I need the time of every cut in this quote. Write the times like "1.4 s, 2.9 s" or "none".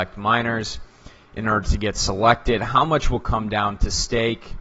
none